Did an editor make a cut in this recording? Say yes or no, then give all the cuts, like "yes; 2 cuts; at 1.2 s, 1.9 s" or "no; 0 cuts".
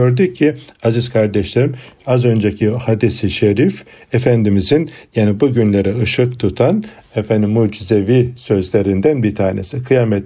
no; 0 cuts